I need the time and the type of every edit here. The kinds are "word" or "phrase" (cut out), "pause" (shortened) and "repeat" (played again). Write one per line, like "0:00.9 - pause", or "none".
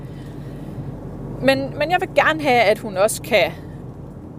none